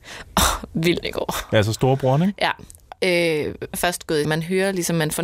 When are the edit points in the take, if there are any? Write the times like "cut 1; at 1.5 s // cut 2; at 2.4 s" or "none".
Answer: cut 1; at 1.0 s // cut 2; at 3.7 s // cut 3; at 4.2 s